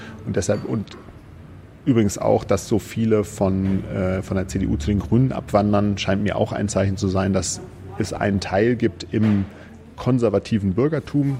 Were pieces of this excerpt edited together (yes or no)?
no